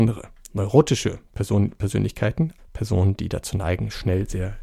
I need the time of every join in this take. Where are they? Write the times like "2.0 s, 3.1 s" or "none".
2.6 s